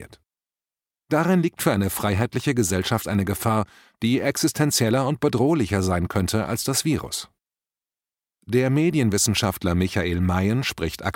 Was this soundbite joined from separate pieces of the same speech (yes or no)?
no